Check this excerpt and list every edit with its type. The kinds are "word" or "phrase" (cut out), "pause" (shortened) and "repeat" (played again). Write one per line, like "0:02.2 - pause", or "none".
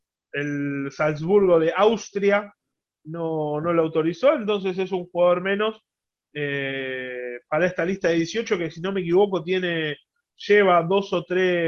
none